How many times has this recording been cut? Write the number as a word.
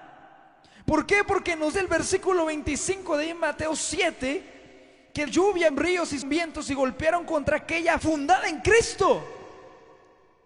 five